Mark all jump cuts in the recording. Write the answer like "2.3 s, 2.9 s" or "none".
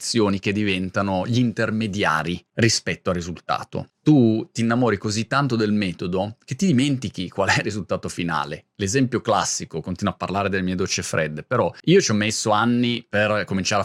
none